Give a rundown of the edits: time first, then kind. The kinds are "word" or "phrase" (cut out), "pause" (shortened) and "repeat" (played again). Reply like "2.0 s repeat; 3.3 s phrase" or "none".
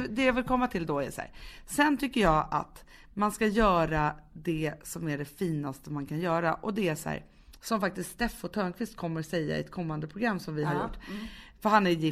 none